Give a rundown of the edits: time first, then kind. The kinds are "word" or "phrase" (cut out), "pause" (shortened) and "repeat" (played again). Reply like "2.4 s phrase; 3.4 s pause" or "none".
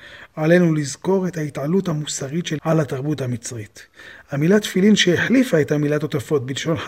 2.6 s word